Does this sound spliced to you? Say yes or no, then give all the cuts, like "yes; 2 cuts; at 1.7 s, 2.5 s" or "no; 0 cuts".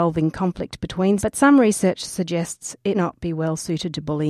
yes; 2 cuts; at 1.2 s, 2.9 s